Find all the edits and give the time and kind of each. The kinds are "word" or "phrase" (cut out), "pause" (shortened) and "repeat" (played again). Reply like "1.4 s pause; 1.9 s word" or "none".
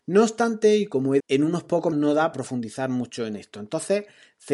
1.2 s word; 1.9 s word; 2.3 s word